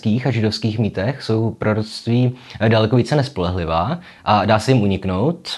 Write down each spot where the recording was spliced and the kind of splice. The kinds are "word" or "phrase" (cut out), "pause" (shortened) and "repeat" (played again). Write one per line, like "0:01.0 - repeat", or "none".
none